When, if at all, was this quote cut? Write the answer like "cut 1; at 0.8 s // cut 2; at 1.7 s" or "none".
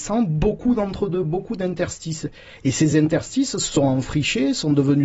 none